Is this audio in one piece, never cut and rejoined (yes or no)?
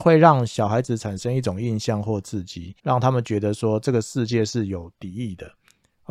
no